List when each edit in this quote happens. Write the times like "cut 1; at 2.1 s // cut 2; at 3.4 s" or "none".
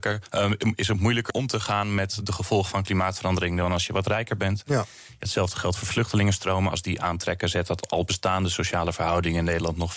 cut 1; at 1.3 s